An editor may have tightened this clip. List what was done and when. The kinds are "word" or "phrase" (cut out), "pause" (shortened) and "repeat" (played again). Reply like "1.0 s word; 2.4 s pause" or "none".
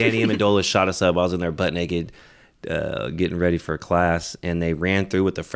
none